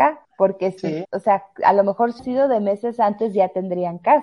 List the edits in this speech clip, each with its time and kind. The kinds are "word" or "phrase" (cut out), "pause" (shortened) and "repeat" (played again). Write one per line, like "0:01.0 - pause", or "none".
0:01.0 - word
0:02.2 - word